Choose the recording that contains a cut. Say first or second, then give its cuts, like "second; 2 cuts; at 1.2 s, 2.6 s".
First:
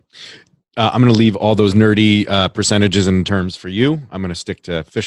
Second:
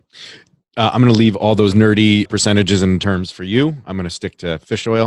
second; 1 cut; at 2.3 s